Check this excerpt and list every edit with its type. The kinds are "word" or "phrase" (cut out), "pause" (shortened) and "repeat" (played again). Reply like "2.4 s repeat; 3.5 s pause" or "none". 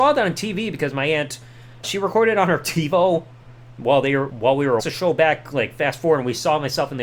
1.8 s word; 4.3 s word; 4.8 s phrase